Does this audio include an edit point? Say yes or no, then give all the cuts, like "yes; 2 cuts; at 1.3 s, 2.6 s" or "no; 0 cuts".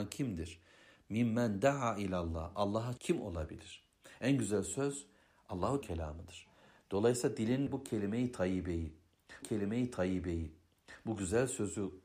yes; 4 cuts; at 3.0 s, 5.8 s, 7.7 s, 9.4 s